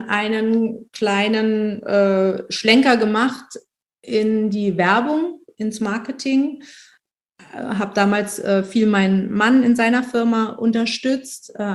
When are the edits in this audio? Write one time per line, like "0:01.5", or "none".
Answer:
none